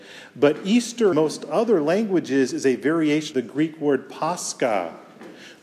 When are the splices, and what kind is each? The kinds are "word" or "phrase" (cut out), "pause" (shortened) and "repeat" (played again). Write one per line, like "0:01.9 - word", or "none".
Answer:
0:01.1 - word
0:03.3 - word